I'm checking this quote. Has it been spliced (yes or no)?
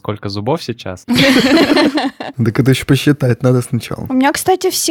no